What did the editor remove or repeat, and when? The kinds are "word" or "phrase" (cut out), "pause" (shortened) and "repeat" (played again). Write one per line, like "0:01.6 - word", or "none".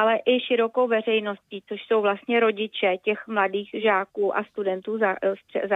none